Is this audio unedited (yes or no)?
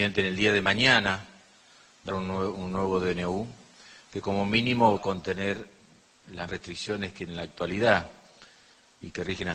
no